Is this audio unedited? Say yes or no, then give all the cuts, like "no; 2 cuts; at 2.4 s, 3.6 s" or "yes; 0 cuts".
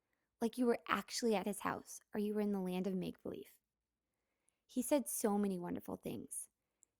yes; 0 cuts